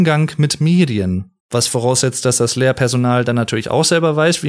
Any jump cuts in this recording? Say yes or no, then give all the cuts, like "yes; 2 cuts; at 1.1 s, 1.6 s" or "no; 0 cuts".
yes; 1 cut; at 1.4 s